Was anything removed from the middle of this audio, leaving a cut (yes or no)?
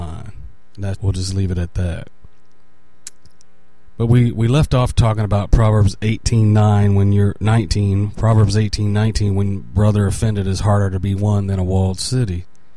yes